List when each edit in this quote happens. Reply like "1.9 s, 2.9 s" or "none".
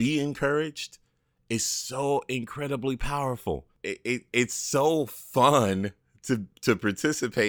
none